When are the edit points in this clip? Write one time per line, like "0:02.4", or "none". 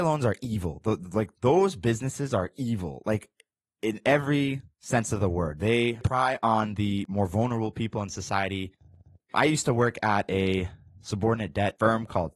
0:01.3